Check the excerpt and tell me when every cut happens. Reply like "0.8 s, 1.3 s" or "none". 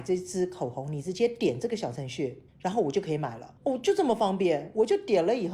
2.5 s, 3.6 s